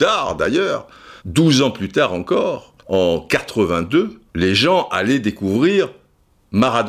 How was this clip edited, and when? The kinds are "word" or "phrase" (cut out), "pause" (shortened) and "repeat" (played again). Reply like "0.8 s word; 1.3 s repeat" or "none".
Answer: 1.2 s pause; 2.8 s pause; 4.3 s pause